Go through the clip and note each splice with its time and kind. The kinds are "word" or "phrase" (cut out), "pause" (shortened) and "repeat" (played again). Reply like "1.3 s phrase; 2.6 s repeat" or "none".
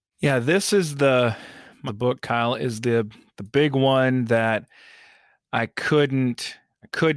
1.9 s phrase